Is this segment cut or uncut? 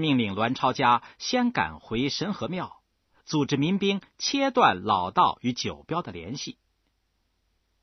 uncut